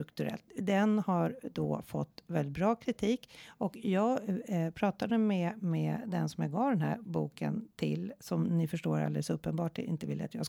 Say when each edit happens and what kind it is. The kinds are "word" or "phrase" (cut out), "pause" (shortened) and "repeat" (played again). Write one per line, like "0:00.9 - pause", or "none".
none